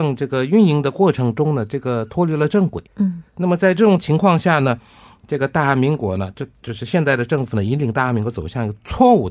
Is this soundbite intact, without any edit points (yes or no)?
no